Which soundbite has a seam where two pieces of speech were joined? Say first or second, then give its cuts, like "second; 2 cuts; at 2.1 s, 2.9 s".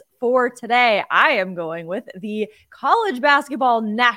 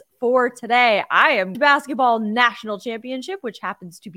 second; 1 cut; at 1.5 s